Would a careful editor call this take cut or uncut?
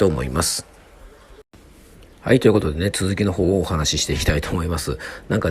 uncut